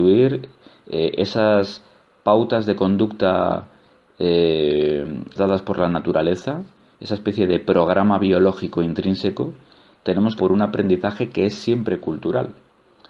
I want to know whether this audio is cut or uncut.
cut